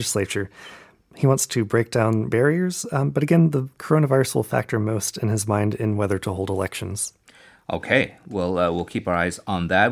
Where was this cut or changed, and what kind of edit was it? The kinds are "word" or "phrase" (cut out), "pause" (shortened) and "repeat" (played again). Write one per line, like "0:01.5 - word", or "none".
0:02.3 - word